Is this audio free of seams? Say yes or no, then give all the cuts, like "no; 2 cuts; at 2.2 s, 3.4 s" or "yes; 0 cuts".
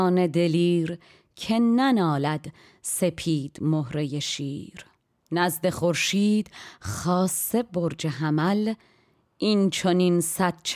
yes; 0 cuts